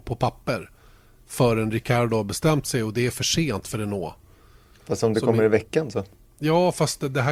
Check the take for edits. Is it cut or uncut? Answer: uncut